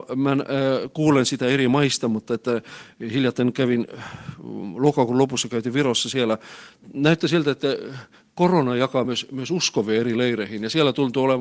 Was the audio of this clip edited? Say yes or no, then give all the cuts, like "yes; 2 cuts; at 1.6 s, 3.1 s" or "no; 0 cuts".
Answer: no; 0 cuts